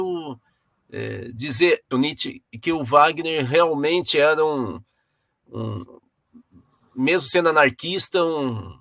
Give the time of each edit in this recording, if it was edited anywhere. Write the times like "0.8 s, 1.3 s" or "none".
1.9 s